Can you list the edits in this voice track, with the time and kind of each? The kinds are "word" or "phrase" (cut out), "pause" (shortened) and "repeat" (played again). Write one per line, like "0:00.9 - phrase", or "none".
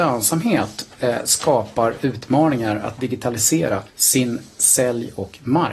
0:03.9 - pause